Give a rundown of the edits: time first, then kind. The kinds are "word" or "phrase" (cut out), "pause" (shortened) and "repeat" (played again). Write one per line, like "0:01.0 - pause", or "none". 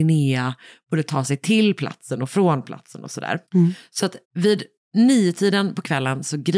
0:03.5 - pause
0:04.2 - pause